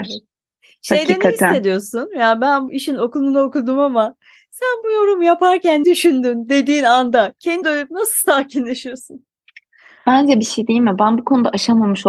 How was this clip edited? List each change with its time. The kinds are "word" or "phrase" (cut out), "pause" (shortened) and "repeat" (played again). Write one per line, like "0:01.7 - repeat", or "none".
0:02.7 - word
0:05.8 - word
0:07.6 - word